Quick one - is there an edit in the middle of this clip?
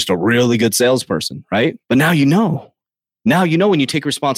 yes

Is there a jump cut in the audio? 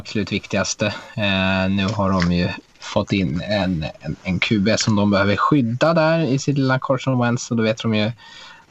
no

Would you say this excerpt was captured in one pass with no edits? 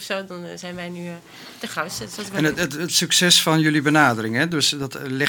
yes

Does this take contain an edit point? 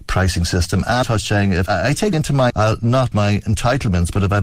yes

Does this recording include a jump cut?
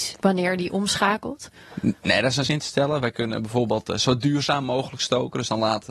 yes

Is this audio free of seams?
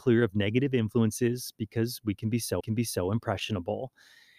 no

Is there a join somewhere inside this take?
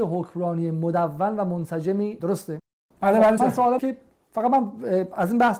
yes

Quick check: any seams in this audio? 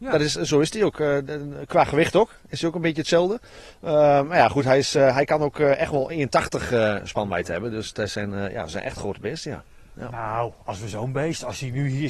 no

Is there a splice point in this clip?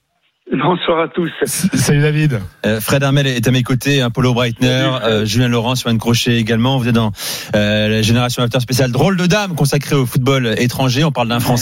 no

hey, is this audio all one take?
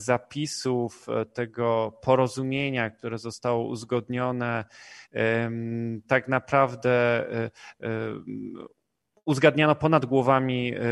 yes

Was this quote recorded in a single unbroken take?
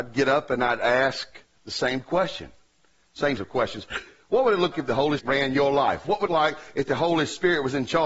no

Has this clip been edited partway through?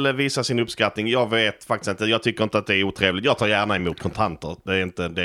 no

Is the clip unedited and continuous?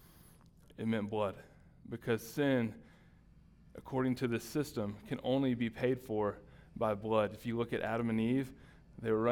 yes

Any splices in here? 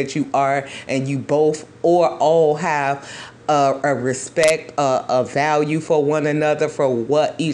no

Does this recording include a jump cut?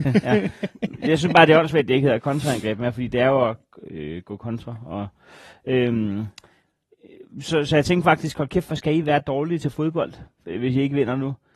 no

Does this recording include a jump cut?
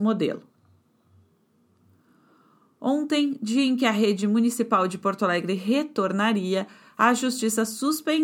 no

